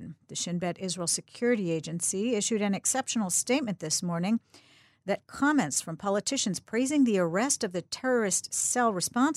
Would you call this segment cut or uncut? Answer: uncut